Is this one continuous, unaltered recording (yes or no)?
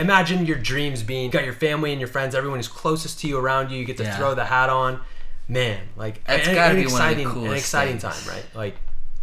no